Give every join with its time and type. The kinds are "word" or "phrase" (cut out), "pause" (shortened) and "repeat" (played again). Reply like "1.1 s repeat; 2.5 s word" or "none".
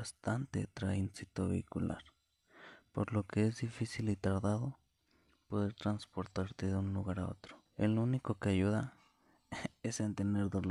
7.7 s pause